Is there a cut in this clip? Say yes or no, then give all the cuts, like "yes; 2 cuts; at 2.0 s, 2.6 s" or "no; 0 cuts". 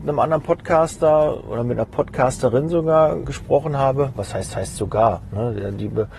yes; 2 cuts; at 3.2 s, 4.5 s